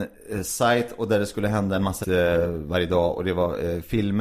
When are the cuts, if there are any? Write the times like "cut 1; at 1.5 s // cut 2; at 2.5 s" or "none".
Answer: cut 1; at 2.0 s